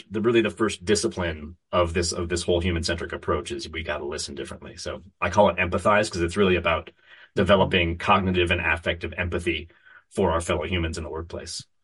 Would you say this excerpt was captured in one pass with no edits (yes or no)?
yes